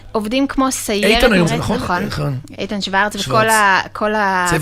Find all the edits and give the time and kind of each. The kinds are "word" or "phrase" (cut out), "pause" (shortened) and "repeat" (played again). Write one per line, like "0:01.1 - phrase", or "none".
0:01.5 - word
0:02.5 - word